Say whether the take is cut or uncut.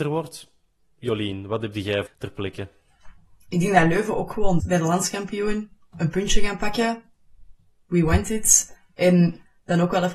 cut